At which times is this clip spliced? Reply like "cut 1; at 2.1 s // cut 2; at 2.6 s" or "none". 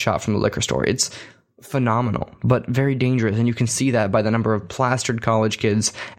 none